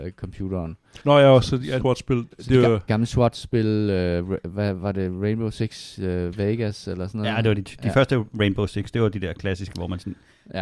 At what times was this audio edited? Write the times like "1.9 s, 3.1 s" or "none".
1.0 s, 1.8 s, 2.9 s